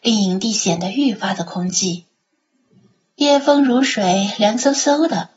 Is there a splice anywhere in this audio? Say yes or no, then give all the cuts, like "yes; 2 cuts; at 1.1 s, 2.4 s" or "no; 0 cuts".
no; 0 cuts